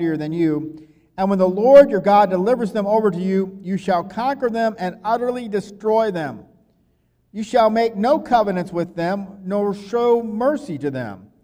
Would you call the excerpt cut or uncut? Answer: uncut